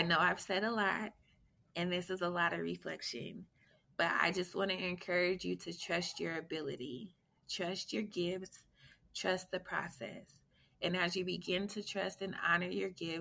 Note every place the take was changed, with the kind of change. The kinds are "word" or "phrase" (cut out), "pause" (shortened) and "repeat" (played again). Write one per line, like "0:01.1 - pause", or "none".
none